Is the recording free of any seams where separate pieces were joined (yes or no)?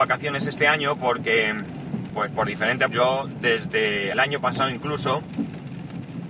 no